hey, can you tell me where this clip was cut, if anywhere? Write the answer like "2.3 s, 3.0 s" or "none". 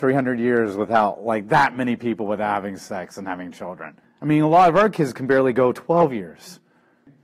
4.0 s